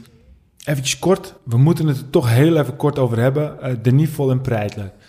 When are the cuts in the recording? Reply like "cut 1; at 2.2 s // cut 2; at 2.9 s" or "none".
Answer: cut 1; at 1.4 s

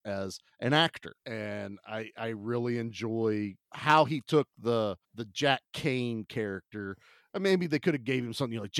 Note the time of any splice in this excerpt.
cut 1; at 1.2 s // cut 2; at 3.6 s // cut 3; at 5.0 s

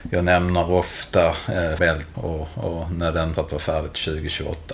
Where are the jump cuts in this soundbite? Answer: cut 1; at 1.8 s // cut 2; at 2.1 s // cut 3; at 3.4 s

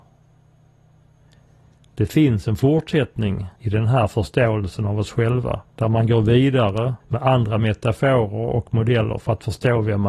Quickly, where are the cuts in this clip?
cut 1; at 3.6 s // cut 2; at 5.7 s // cut 3; at 7.0 s

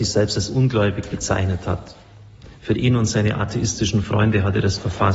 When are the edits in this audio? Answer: none

